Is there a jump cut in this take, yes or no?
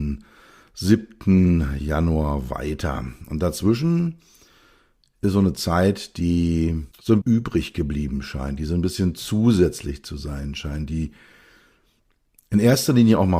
yes